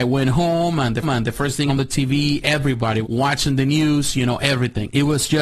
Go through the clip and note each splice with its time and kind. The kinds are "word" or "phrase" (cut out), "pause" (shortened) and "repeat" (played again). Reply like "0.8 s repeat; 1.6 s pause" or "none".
1.0 s repeat; 1.7 s phrase; 3.0 s phrase